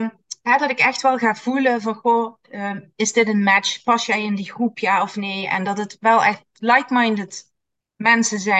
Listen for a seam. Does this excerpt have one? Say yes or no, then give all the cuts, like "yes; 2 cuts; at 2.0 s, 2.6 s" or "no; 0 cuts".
no; 0 cuts